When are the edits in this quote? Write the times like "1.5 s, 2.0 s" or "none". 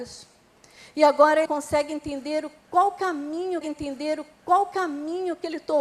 1.5 s, 3.6 s